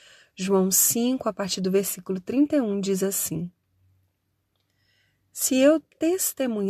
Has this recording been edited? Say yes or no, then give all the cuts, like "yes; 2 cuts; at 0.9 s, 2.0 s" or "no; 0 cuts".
no; 0 cuts